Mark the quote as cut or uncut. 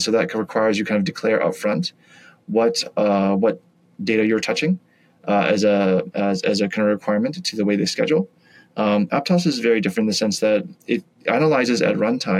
uncut